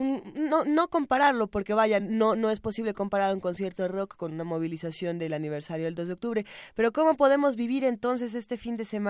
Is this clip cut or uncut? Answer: uncut